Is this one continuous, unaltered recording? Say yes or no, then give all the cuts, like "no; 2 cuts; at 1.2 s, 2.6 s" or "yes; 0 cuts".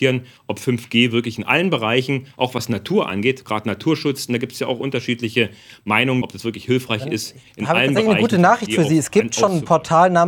no; 1 cut; at 6.2 s